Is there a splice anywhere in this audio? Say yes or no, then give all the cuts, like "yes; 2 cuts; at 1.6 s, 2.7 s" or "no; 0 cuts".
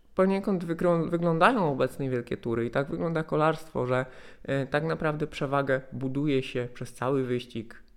no; 0 cuts